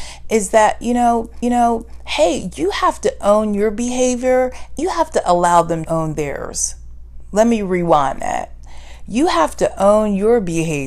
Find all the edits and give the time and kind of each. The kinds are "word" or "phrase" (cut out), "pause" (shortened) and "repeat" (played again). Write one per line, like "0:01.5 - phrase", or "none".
0:01.4 - repeat
0:04.8 - word
0:05.9 - word